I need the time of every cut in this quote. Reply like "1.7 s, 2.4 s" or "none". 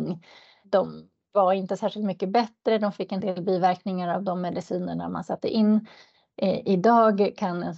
3.2 s